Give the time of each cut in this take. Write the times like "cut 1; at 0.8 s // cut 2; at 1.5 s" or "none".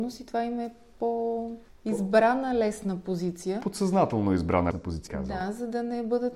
cut 1; at 1.7 s // cut 2; at 4.7 s // cut 3; at 5.1 s